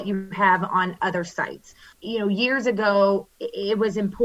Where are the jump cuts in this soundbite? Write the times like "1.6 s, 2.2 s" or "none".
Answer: 1.9 s